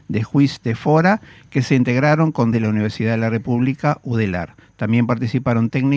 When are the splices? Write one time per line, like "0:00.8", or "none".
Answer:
0:02.5